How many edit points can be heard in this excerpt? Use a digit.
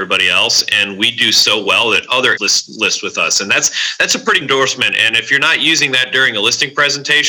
2